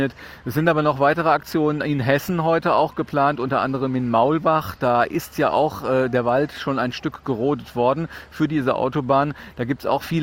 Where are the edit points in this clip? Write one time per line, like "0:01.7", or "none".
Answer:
none